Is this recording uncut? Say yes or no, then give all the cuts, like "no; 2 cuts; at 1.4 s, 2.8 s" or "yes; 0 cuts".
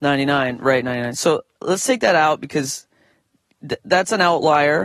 yes; 0 cuts